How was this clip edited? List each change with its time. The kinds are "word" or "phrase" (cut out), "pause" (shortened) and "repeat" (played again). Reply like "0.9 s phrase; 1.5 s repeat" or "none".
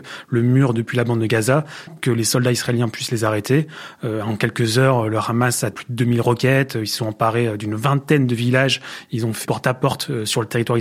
1.9 s word; 5.7 s word; 9.4 s word

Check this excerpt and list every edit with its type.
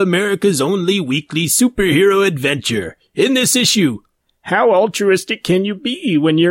none

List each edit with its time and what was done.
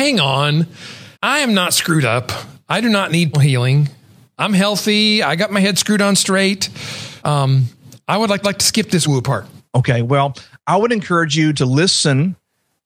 1.1 s pause; 3.3 s word; 7.2 s pause; 8.4 s repeat; 9.0 s word; 9.6 s pause; 11.5 s word

